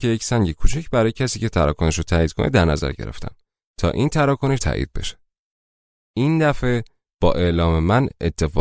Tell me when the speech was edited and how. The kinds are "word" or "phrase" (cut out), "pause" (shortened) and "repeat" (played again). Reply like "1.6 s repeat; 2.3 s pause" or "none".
4.6 s word